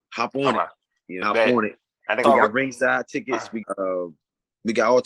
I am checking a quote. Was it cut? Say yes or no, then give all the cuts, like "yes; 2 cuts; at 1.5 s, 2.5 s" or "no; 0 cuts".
yes; 3 cuts; at 1.2 s, 2.2 s, 3.6 s